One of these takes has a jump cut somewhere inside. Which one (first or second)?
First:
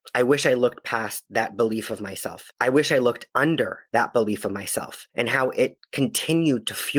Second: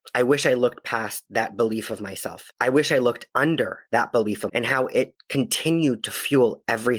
second